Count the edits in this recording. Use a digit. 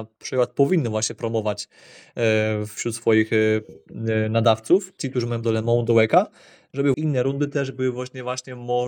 3